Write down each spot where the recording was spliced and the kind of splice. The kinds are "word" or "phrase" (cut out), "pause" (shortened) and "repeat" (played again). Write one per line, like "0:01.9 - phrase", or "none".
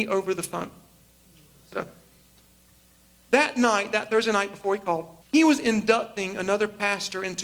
0:05.2 - pause